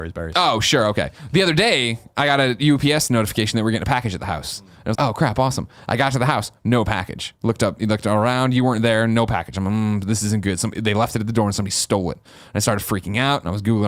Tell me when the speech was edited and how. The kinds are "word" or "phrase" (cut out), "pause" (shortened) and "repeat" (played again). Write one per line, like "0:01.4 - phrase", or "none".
0:04.9 - word